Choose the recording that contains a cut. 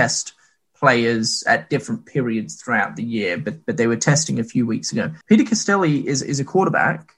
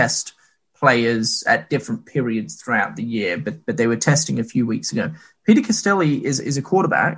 first; 1 cut; at 5.2 s

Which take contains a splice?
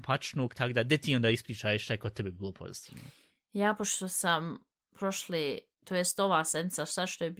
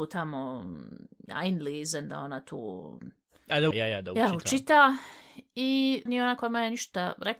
second; 2 cuts; at 3.7 s, 6.1 s

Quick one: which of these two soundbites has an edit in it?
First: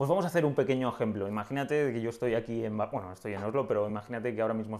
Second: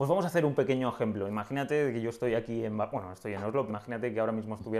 second; 1 cut; at 3.7 s

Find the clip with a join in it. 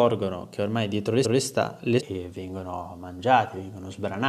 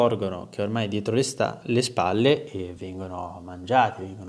first; 2 cuts; at 1.2 s, 2.0 s

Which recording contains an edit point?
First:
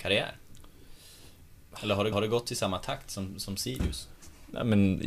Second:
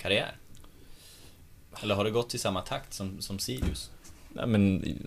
first; 1 cut; at 2.1 s

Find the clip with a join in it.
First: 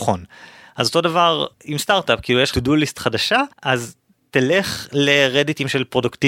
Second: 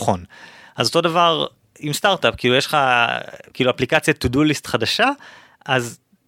first; 3 cuts; at 1.5 s, 2.5 s, 3.5 s

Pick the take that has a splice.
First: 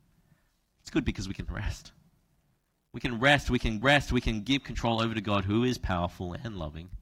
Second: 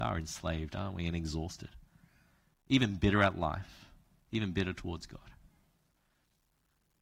first; 1 cut; at 3.8 s

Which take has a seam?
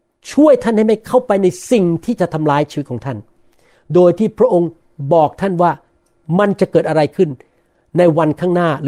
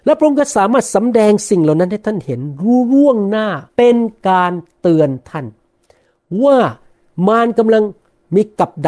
second; 1 cut; at 3.7 s

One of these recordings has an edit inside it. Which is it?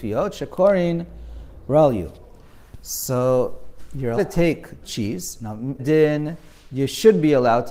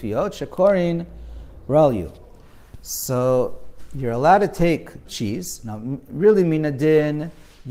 first; 2 cuts; at 4.2 s, 5.8 s

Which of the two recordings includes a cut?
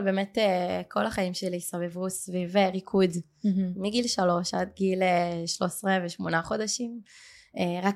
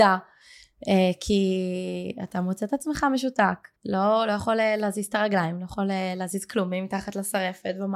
second; 1 cut; at 3.8 s

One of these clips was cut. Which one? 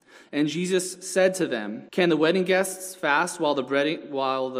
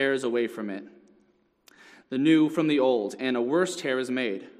first; 1 cut; at 1.9 s

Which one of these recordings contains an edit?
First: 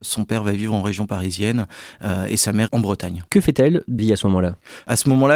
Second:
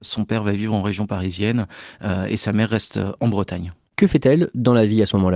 first; 3 cuts; at 2.7 s, 3.3 s, 4.0 s

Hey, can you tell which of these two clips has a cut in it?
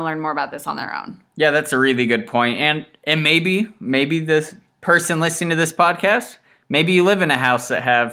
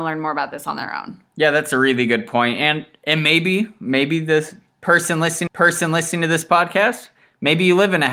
second; 1 cut; at 5.5 s

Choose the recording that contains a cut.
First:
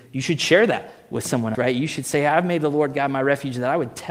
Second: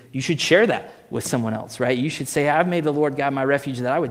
first; 1 cut; at 1.5 s

